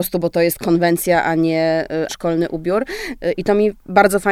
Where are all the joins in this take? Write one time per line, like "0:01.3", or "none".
0:02.1